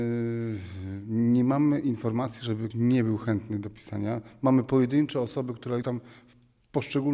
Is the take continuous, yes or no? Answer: no